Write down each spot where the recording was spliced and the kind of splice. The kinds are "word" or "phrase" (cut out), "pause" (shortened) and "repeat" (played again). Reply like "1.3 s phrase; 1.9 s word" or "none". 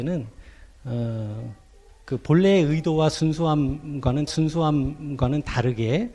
4.3 s repeat